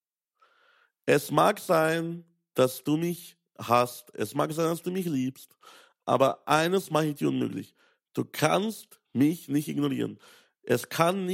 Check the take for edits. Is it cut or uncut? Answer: uncut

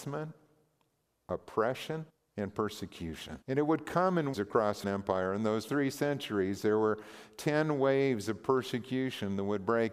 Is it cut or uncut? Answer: cut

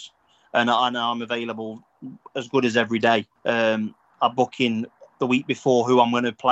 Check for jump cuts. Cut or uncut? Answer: cut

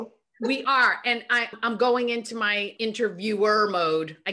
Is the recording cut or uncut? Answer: cut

